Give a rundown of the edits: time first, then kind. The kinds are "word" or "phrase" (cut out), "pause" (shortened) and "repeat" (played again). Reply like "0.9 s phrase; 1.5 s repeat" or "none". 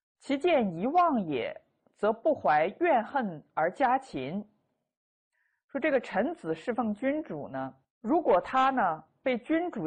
none

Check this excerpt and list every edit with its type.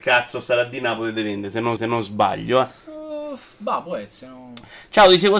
1.8 s repeat; 2.8 s pause

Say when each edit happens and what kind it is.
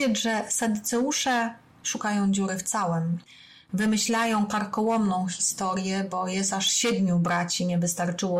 none

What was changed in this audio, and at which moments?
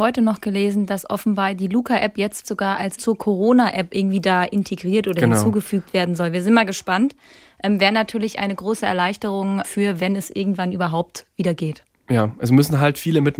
2.4 s word; 3.0 s word; 9.6 s word

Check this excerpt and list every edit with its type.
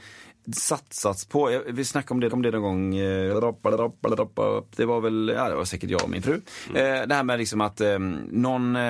2.3 s repeat

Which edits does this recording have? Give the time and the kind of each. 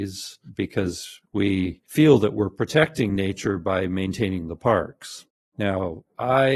none

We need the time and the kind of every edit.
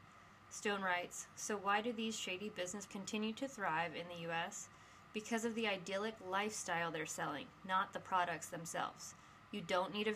2.9 s word

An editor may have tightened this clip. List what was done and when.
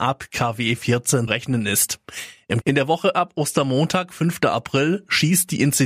1.3 s word; 2.6 s word

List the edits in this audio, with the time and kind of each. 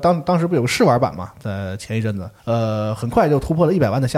2.4 s pause

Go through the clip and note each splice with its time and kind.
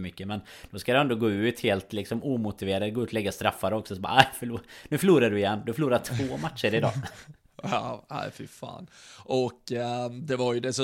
none

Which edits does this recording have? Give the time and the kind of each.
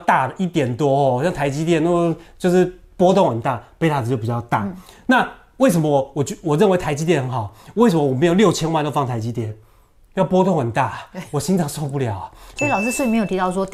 none

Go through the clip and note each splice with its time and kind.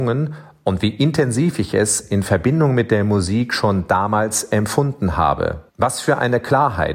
5.7 s pause

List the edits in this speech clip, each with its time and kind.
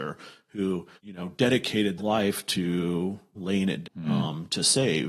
1.0 s pause; 2.0 s word; 3.4 s word; 3.8 s word

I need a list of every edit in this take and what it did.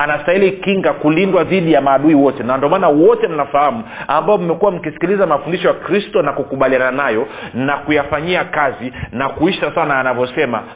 none

